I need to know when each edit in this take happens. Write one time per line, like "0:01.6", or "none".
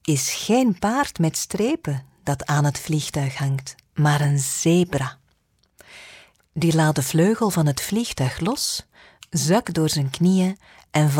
none